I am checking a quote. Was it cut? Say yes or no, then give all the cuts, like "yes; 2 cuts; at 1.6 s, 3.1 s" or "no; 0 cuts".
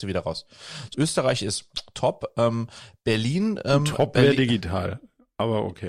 yes; 1 cut; at 0.9 s